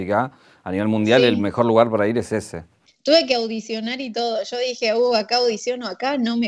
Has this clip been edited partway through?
no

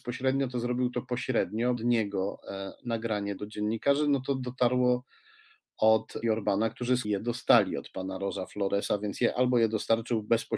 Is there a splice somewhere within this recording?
yes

